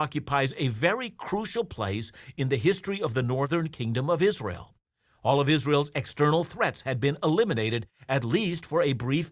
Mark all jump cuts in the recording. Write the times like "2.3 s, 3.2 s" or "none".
none